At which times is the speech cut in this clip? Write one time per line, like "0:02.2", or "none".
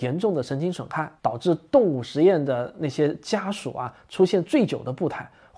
0:01.2